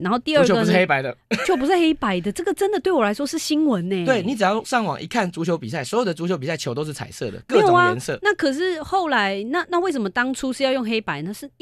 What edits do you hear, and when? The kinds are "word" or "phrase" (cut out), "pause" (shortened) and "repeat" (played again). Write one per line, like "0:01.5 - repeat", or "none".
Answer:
0:01.4 - word